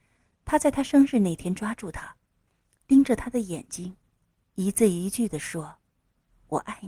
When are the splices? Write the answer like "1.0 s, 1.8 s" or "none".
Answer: none